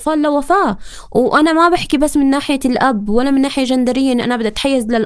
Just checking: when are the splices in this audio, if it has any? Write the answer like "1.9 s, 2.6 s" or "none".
none